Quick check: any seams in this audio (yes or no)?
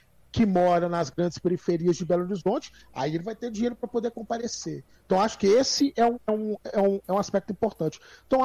no